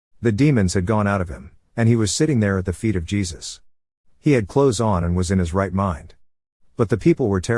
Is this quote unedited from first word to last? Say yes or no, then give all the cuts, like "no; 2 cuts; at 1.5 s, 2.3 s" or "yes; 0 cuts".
yes; 0 cuts